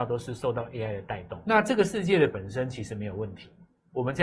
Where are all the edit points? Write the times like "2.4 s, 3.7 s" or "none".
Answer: 1.4 s